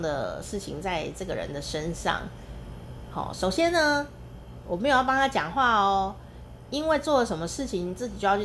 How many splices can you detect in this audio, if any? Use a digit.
0